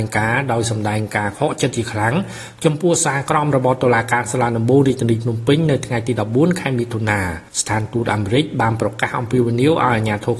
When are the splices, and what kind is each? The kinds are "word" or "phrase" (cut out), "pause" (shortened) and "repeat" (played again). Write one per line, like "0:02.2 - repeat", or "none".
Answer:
0:07.5 - pause